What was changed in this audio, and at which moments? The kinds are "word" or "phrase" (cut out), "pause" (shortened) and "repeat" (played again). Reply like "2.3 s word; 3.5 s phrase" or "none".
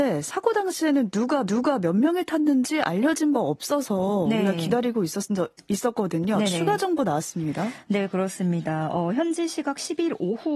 1.5 s repeat; 3.3 s word